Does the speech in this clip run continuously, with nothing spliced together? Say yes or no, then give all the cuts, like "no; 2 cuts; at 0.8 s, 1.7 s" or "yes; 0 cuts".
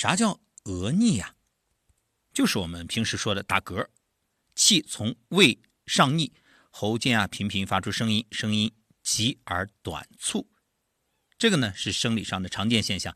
yes; 0 cuts